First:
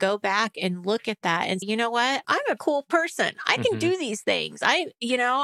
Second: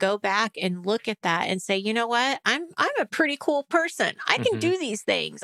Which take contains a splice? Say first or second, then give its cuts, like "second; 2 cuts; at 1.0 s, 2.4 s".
first; 3 cuts; at 1.6 s, 2.2 s, 2.6 s